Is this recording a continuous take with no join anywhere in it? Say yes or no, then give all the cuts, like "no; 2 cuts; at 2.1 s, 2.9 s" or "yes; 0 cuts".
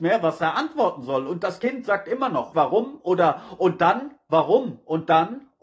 no; 1 cut; at 2.5 s